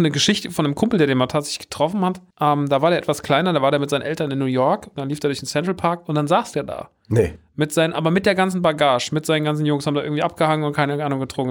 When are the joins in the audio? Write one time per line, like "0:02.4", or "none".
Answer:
0:02.3